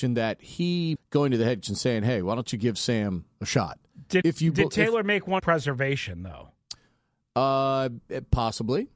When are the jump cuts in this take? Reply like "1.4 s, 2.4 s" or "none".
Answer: 1.0 s, 1.6 s, 4.2 s, 5.4 s